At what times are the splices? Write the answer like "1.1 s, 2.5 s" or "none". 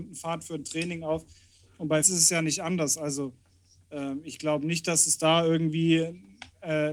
2.0 s